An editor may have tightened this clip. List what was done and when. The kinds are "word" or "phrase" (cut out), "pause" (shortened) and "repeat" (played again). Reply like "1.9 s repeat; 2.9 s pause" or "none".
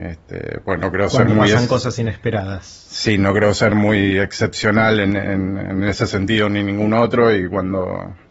none